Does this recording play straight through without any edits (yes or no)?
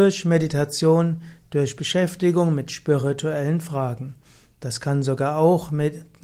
yes